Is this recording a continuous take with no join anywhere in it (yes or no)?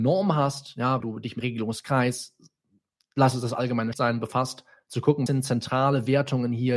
no